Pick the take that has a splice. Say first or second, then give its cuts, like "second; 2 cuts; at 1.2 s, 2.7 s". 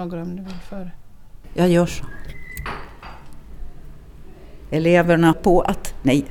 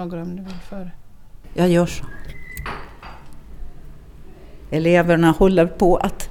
first; 1 cut; at 5.3 s